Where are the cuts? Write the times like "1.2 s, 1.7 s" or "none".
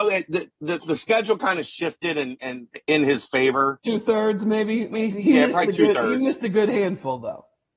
none